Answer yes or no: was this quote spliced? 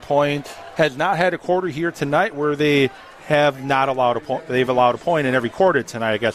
no